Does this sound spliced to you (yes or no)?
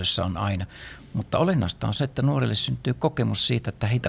no